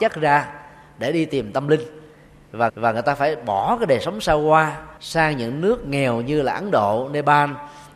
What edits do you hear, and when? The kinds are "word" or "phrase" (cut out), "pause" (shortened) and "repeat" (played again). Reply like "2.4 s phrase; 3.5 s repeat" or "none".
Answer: 2.7 s repeat; 5.0 s pause